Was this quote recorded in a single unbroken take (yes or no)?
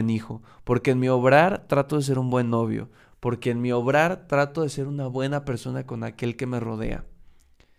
yes